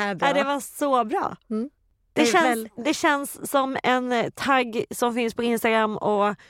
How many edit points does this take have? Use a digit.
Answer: 0